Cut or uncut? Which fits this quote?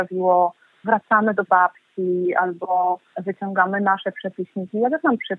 cut